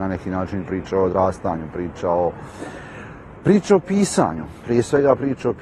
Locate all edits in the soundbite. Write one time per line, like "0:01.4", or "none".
none

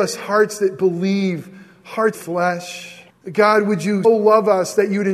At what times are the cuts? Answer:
0:02.1
0:03.1
0:04.0

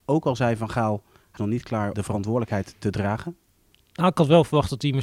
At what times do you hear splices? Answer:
0:01.4
0:01.9

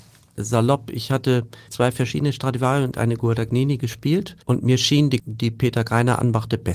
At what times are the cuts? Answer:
0:01.7
0:04.4
0:05.2

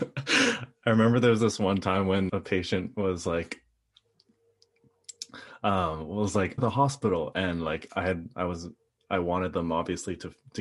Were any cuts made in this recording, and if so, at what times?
0:02.3
0:06.6

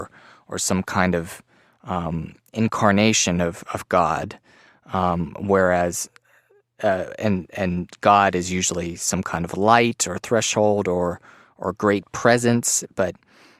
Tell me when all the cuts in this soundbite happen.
none

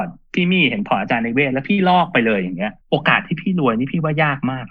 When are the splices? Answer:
0:02.8

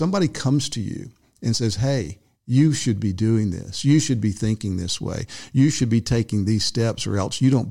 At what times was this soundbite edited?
none

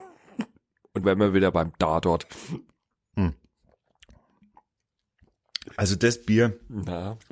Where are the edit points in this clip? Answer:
0:01.0

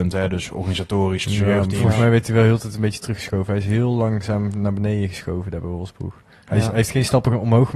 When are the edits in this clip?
0:01.2

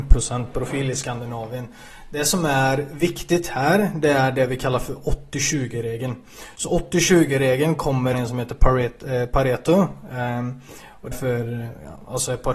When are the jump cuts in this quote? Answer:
0:08.1
0:11.1

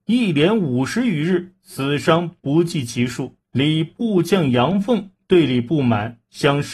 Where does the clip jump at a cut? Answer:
0:03.4

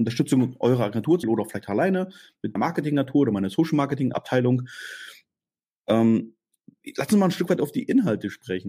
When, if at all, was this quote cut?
0:01.2
0:02.6
0:04.1

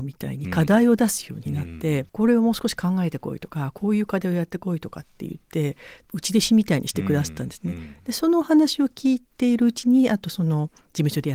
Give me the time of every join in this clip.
0:02.1

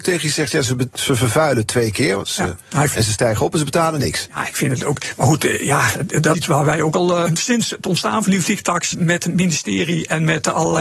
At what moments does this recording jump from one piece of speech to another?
0:02.9
0:06.3
0:07.3
0:08.9

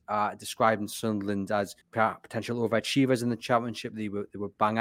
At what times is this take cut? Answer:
0:01.8

